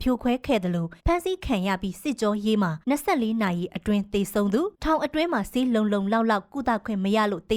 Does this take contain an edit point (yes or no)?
yes